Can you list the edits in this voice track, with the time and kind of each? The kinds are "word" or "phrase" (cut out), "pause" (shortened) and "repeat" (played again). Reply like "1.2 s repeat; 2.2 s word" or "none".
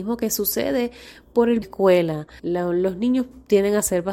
1.6 s phrase; 2.4 s pause

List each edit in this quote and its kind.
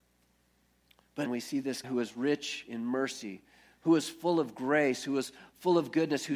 1.3 s word; 1.8 s word

